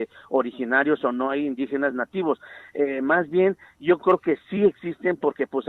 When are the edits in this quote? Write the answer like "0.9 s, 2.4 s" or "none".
none